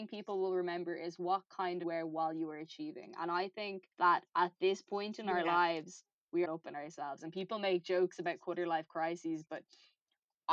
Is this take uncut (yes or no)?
no